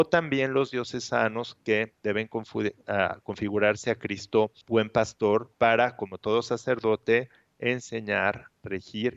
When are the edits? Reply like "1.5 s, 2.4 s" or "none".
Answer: 4.6 s, 5.5 s